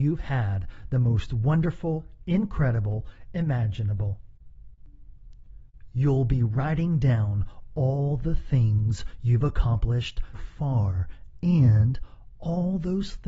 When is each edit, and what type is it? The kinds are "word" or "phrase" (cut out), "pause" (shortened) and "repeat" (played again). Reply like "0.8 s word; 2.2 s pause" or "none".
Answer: 3.3 s phrase; 10.3 s word

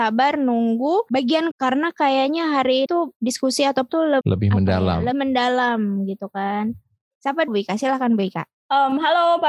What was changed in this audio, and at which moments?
1.5 s word; 2.9 s word; 3.9 s word; 4.2 s word; 5.1 s word; 7.5 s word

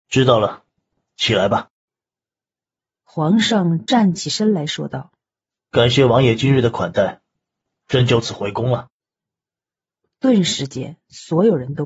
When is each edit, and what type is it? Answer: 5.6 s pause

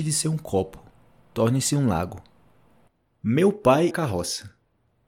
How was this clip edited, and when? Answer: 3.9 s phrase

